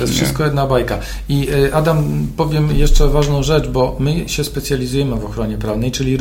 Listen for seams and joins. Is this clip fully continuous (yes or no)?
yes